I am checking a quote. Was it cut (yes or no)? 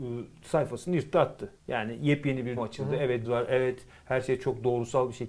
yes